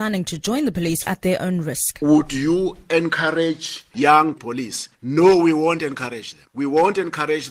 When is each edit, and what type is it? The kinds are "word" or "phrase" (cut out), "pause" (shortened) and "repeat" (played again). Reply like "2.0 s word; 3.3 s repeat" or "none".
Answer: 1.0 s phrase; 4.4 s phrase